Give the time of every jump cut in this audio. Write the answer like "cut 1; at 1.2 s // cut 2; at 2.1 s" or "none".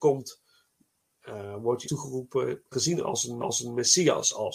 cut 1; at 1.8 s // cut 2; at 2.7 s // cut 3; at 3.4 s

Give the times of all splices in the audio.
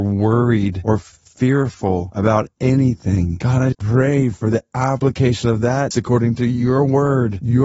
cut 1; at 3.7 s // cut 2; at 5.9 s

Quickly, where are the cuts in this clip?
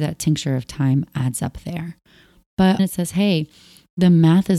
cut 1; at 2.8 s

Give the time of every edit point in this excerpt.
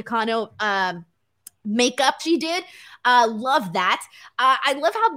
cut 1; at 2.2 s

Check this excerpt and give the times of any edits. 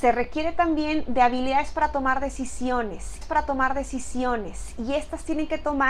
cut 1; at 3.2 s

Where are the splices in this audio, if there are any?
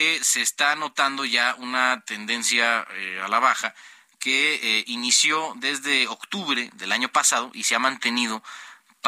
none

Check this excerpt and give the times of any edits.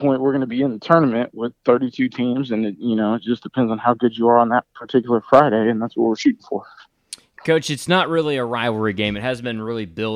none

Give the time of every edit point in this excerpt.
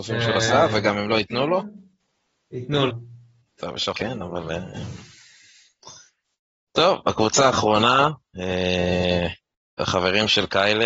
cut 1; at 2.9 s // cut 2; at 3.9 s

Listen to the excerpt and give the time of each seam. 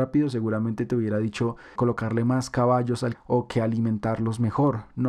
cut 1; at 1.8 s // cut 2; at 3.1 s

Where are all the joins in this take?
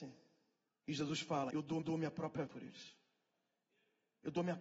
cut 1; at 1.5 s // cut 2; at 1.8 s // cut 3; at 2.5 s

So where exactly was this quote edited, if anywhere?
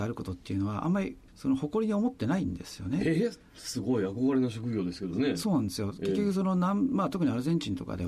cut 1; at 1.3 s

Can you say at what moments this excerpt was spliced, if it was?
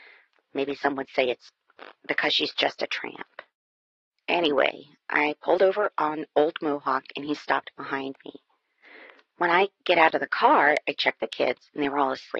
none

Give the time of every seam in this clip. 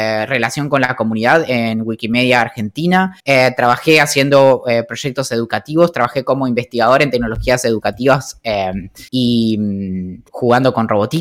cut 1; at 3.2 s // cut 2; at 9.1 s // cut 3; at 10.3 s

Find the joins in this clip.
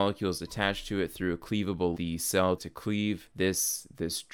cut 1; at 1.9 s // cut 2; at 2.6 s

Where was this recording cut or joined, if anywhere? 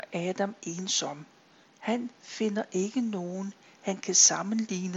none

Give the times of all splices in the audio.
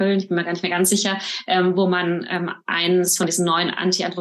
none

